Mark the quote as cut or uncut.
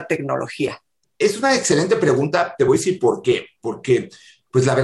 uncut